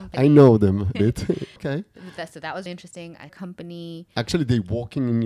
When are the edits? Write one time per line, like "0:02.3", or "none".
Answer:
0:00.9
0:01.6
0:02.7
0:03.3